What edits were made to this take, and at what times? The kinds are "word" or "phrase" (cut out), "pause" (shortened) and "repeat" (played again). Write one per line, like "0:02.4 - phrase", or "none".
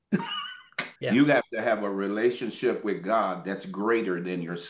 0:01.0 - pause